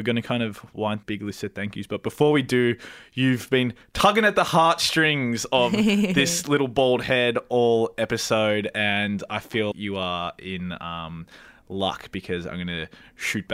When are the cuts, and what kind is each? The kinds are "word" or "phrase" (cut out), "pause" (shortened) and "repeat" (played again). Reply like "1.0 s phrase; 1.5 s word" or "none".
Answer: 1.0 s phrase; 9.7 s word

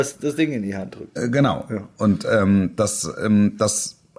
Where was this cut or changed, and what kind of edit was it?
none

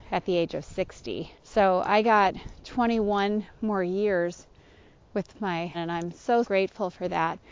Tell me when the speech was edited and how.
1.3 s pause; 5.7 s word; 6.4 s word

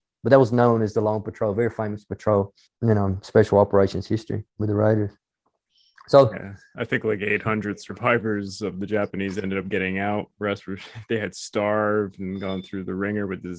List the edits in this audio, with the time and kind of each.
2.7 s pause; 4.5 s pause

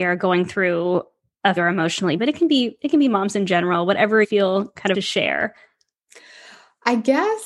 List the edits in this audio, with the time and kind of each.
1.6 s word; 2.2 s phrase; 4.2 s word; 4.9 s phrase

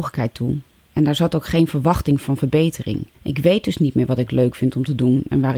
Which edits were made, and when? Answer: 3.1 s pause

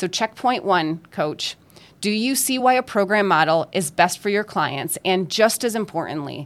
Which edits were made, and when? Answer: none

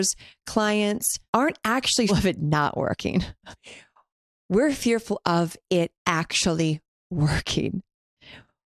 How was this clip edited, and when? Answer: 1.3 s pause; 2.1 s word; 6.0 s pause

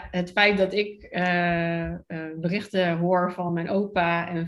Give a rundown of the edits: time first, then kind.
none

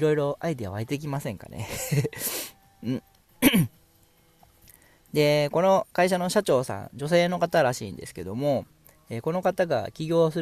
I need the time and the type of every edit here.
none

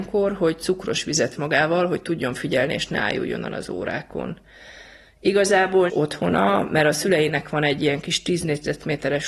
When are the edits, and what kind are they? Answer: 1.4 s word; 5.9 s word

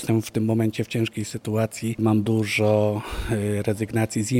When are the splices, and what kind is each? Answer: 2.2 s word

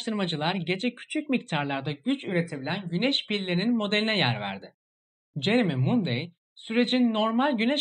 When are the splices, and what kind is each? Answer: none

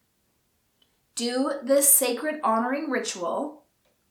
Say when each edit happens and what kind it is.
none

